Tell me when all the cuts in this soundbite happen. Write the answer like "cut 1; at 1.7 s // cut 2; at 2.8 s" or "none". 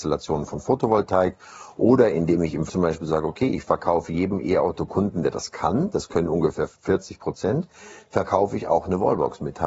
cut 1; at 2.7 s // cut 2; at 6.7 s